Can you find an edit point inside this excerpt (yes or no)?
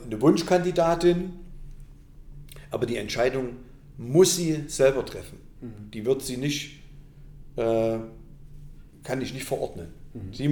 no